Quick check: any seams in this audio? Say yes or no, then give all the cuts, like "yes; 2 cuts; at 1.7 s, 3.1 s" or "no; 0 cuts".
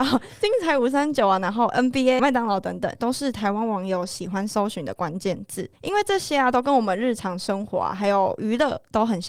yes; 2 cuts; at 2.2 s, 5.8 s